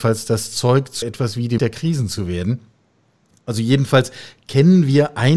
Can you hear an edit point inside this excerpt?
yes; 2 cuts; at 1.0 s, 1.6 s

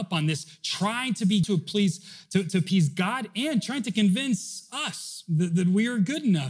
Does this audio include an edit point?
yes; 1 cut; at 1.4 s

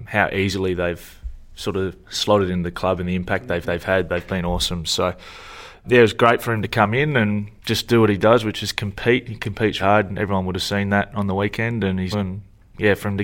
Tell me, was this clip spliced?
yes; 6 cuts; at 2.0 s, 3.6 s, 5.8 s, 7.6 s, 9.8 s, 12.1 s

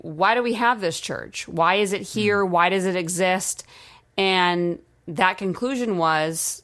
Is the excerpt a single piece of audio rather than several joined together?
yes; 0 cuts

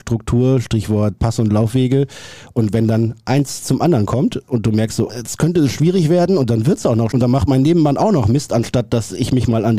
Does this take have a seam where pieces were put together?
yes; 3 cuts; at 1.2 s, 5.1 s, 7.1 s

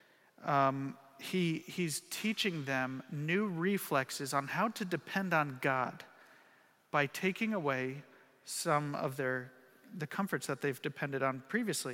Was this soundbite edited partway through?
no; 0 cuts

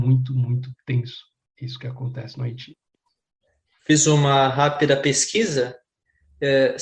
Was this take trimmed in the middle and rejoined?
no; 0 cuts

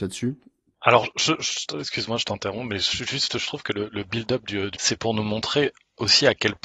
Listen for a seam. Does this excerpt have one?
yes; 1 cut; at 4.8 s

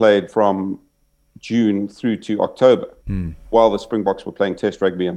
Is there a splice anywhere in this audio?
no; 0 cuts

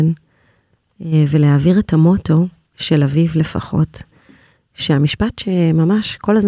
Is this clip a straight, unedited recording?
yes; 0 cuts

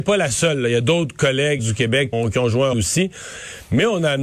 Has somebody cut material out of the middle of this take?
yes; 3 cuts; at 1.6 s, 2.1 s, 2.7 s

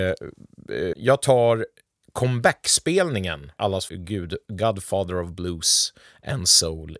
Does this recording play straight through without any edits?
no; 3 cuts; at 0.9 s, 3.6 s, 3.9 s

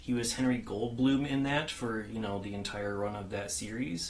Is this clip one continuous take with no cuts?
yes; 0 cuts

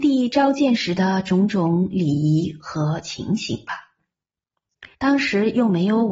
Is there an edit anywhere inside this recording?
yes; 1 cut; at 4.9 s

